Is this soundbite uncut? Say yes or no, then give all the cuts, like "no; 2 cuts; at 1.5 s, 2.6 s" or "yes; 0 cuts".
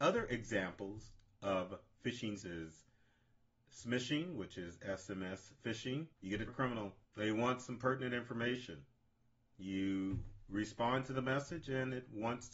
no; 4 cuts; at 2.4 s, 6.1 s, 6.5 s, 7.0 s